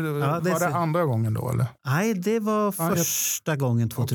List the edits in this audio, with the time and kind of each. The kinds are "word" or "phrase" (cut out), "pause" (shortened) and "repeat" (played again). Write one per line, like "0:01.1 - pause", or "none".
0:01.8 - pause

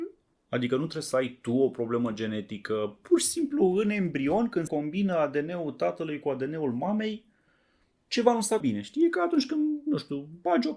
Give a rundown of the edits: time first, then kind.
0:04.7 - word
0:08.6 - word

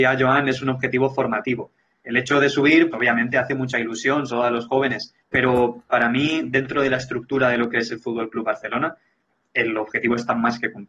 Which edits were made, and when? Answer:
0:02.9 - word
0:04.3 - word
0:05.2 - pause

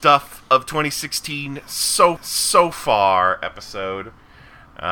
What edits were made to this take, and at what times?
0:02.2 - repeat

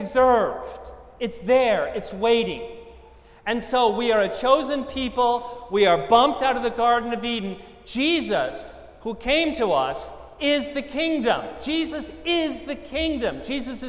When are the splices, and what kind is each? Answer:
none

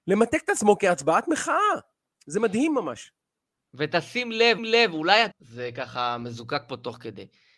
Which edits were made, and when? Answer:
0:04.6 - repeat
0:05.3 - phrase

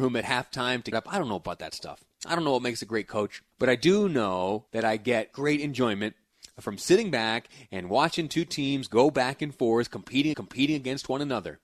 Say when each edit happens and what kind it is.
0:00.9 - phrase
0:03.5 - pause
0:04.7 - pause
0:05.3 - word
0:10.3 - repeat

